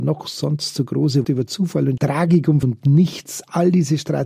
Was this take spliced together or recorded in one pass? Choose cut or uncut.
cut